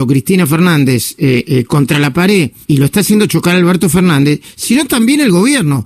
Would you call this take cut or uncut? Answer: cut